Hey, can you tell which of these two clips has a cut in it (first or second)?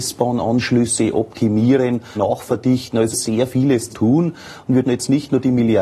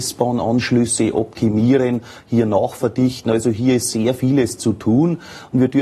first